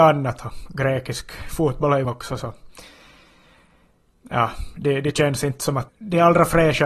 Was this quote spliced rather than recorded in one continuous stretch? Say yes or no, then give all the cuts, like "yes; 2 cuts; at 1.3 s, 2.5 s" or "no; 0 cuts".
yes; 2 cuts; at 2.0 s, 5.9 s